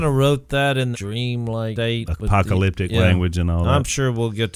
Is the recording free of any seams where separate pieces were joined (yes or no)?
no